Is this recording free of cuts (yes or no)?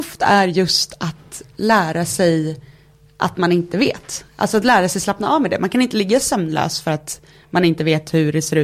yes